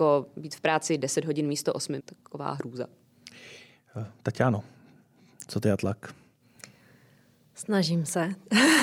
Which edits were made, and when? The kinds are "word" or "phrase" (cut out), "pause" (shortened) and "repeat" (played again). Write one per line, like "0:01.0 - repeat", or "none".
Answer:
0:02.0 - phrase